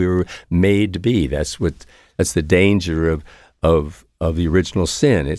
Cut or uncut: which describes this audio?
uncut